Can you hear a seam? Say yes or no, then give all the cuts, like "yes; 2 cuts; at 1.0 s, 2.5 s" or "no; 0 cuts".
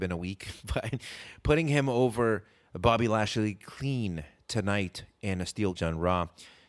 yes; 1 cut; at 5.8 s